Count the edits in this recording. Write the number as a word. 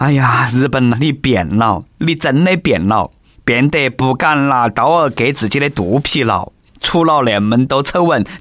one